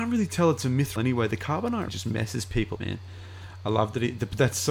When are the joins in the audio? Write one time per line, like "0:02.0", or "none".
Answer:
0:01.0
0:01.9
0:02.8